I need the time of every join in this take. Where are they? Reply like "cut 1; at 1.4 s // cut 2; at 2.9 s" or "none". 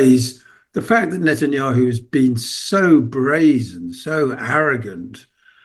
none